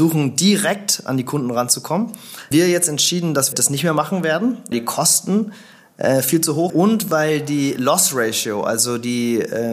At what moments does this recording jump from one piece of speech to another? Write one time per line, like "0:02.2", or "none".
0:02.5
0:03.5
0:04.7
0:06.7